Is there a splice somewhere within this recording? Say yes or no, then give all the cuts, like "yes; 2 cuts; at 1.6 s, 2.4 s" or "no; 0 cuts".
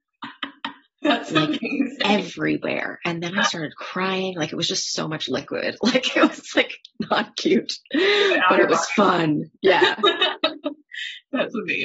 yes; 2 cuts; at 7.8 s, 9.6 s